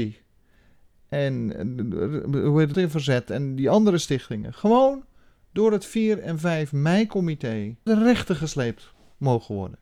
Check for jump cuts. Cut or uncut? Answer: cut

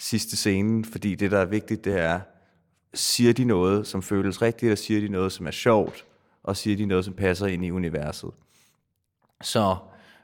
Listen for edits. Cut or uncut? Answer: uncut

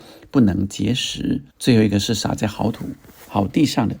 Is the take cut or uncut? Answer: cut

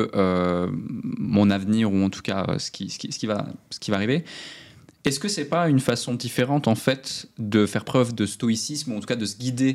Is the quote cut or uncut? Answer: uncut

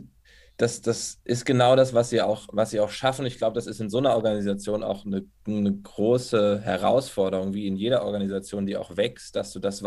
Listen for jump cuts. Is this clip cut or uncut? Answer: uncut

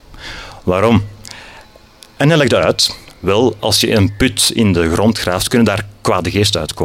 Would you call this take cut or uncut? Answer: uncut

